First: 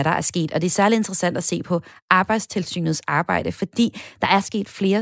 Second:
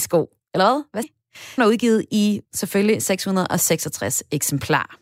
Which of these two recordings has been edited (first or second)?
second